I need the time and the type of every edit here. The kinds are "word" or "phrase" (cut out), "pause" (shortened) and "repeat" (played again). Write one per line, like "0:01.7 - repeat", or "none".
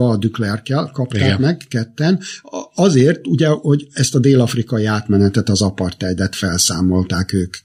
none